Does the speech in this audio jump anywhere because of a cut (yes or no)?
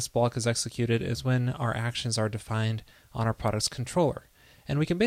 no